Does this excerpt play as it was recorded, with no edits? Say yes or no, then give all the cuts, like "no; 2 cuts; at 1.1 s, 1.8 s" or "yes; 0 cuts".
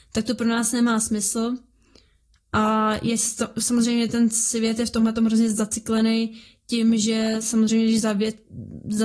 yes; 0 cuts